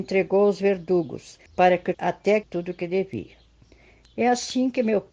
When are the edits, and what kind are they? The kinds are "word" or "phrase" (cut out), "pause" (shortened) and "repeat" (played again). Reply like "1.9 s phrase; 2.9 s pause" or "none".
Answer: 1.5 s pause; 1.9 s word; 2.4 s phrase

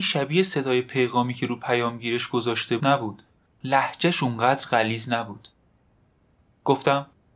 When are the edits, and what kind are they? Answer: 2.8 s word

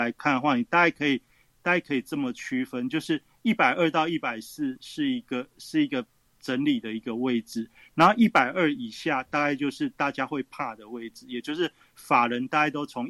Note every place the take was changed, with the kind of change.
none

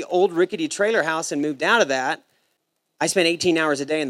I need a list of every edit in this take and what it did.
none

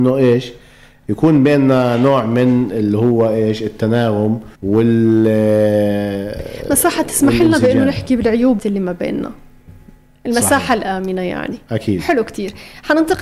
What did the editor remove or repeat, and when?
4.5 s pause; 8.6 s word

